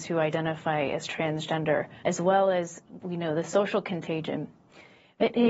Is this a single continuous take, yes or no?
no